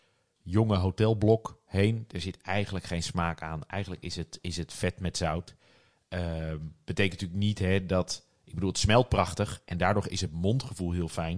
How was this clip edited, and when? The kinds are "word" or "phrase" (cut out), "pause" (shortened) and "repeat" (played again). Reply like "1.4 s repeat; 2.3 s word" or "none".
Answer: none